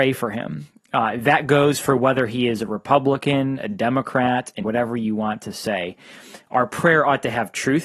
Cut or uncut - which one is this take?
cut